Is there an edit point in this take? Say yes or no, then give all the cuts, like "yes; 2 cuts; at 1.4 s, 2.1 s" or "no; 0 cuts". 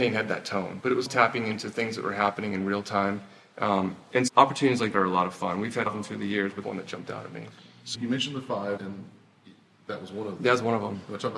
yes; 7 cuts; at 1.1 s, 4.3 s, 4.9 s, 5.9 s, 6.6 s, 7.9 s, 8.8 s